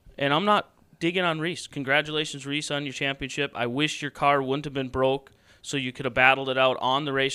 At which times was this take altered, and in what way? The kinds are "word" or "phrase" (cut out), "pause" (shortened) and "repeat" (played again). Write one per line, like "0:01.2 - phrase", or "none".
none